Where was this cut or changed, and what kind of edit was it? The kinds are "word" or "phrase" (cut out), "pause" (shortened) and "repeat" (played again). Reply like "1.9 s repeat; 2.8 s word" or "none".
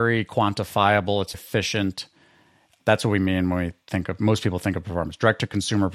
1.3 s word